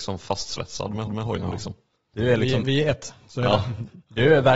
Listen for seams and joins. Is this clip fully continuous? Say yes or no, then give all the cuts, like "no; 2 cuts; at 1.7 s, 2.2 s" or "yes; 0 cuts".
no; 1 cut; at 1.1 s